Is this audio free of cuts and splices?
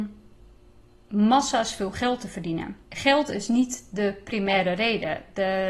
no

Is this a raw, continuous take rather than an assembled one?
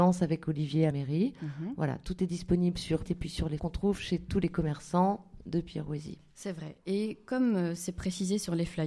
no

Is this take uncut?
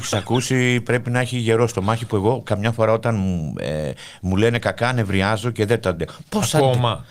yes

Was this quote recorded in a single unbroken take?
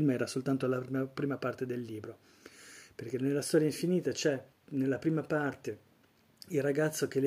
no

